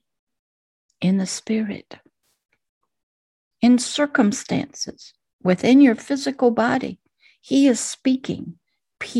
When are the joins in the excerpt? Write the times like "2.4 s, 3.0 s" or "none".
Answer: none